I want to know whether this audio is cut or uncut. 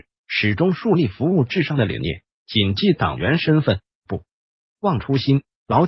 uncut